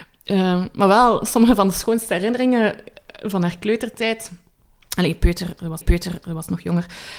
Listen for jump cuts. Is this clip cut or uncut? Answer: cut